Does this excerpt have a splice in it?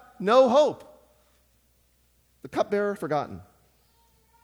yes; 1 cut; at 3.0 s

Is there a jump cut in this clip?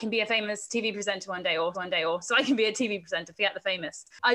yes; 1 cut; at 1.7 s

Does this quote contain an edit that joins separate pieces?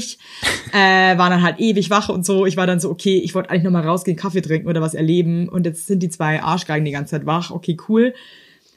no; 0 cuts

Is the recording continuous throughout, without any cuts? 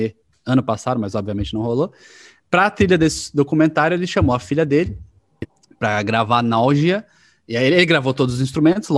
yes; 0 cuts

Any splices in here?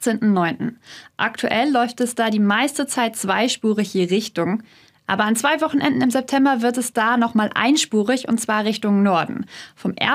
no; 0 cuts

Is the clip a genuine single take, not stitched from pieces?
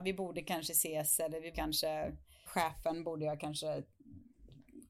no; 2 cuts; at 1.5 s, 2.5 s

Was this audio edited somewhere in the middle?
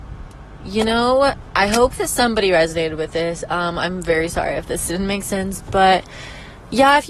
no; 0 cuts

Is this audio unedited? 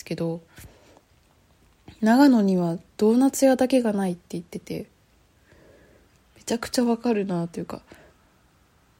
yes; 0 cuts

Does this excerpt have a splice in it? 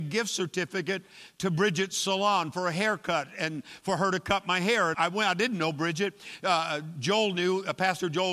yes; 1 cut; at 4.9 s

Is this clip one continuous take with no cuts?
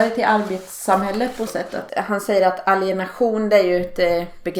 no; 2 cuts; at 1.5 s, 1.9 s

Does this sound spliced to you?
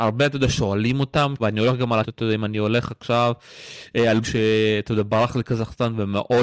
yes; 3 cuts; at 1.4 s, 2.0 s, 4.2 s

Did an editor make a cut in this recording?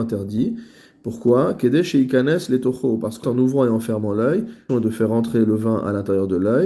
yes; 2 cuts; at 3.2 s, 4.7 s

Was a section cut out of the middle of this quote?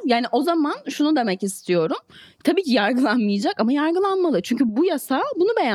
no; 0 cuts

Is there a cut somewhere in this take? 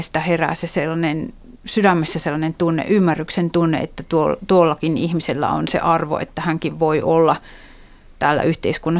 yes; 1 cut; at 1.6 s

